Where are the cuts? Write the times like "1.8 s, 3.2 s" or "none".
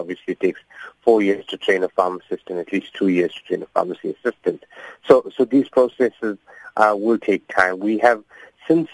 none